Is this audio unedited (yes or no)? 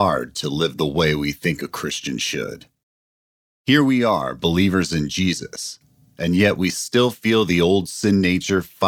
yes